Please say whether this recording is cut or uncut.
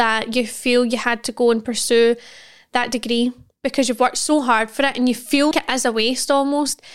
cut